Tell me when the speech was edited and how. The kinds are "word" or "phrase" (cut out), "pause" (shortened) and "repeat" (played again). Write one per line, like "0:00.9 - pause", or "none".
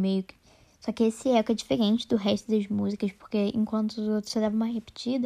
none

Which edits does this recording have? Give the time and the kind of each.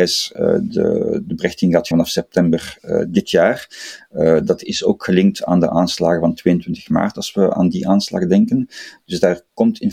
0:01.9 - word

